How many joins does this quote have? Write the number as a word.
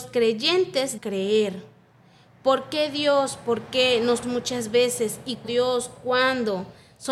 three